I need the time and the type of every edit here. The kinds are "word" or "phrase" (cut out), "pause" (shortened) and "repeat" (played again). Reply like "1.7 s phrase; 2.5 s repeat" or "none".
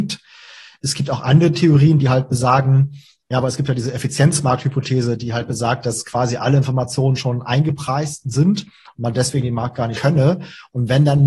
9.9 s word